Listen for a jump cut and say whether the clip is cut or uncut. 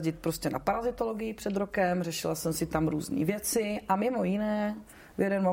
uncut